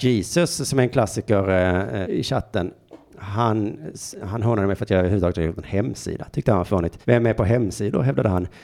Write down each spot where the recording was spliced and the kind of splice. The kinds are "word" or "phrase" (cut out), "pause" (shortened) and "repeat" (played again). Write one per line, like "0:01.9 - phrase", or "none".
0:02.0 - word
0:07.0 - pause